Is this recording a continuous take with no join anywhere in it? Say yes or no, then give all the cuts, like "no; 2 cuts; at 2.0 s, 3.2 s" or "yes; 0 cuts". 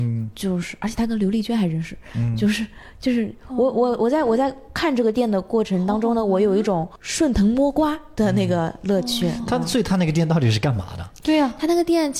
yes; 0 cuts